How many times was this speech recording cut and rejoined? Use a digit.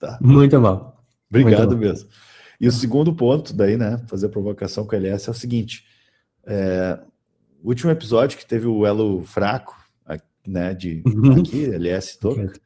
0